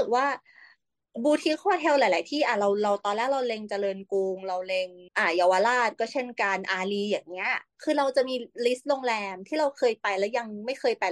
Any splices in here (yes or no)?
yes